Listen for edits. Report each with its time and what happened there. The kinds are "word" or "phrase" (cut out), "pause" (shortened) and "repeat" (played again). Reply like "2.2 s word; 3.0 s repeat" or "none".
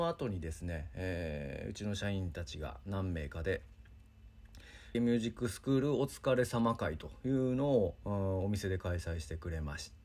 4.9 s phrase